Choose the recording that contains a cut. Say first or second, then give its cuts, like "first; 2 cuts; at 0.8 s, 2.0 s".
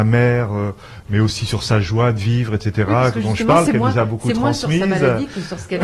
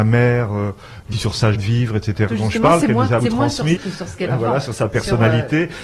second; 6 cuts; at 1.1 s, 1.5 s, 2.3 s, 3.2 s, 3.8 s, 4.3 s